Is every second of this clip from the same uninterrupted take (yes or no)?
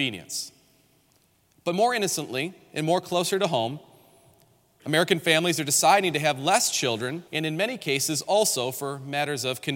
no